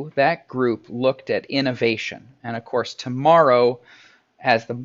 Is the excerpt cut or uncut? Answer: uncut